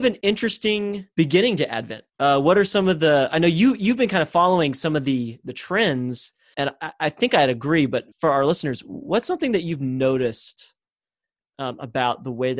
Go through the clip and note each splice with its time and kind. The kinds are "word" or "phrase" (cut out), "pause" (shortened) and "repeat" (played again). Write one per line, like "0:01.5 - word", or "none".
0:01.1 - pause
0:02.1 - pause
0:06.5 - word
0:08.1 - pause